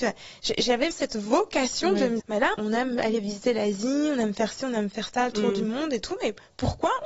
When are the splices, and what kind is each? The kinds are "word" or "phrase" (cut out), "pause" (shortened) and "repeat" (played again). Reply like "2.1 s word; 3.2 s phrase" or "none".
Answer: 0.9 s word; 2.2 s word; 2.5 s word